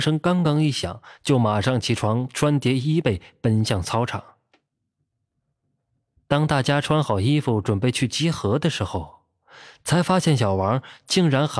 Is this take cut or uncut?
uncut